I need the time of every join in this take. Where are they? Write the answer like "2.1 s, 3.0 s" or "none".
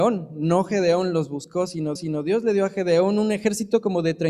2.0 s